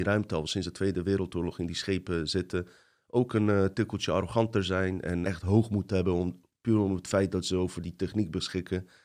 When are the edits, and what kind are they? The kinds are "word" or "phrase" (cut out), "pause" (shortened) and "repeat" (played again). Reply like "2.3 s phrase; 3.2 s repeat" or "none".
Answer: 5.2 s word